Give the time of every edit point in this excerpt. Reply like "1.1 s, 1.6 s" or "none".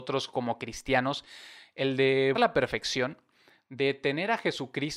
2.3 s